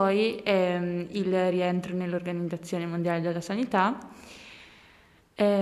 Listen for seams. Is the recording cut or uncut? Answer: uncut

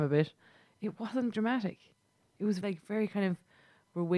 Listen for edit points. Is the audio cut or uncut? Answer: cut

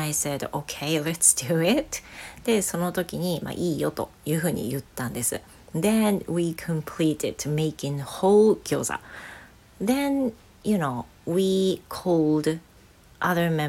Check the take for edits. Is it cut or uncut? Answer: uncut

